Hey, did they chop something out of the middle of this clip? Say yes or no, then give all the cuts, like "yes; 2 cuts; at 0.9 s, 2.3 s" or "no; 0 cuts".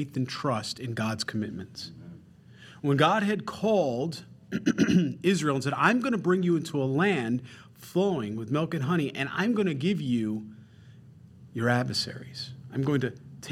no; 0 cuts